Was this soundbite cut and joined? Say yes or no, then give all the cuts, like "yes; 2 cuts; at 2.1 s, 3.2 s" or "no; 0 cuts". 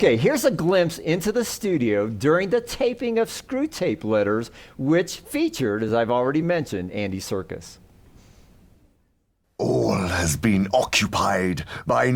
no; 0 cuts